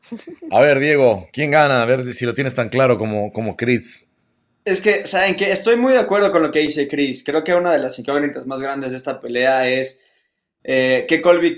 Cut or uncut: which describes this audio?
cut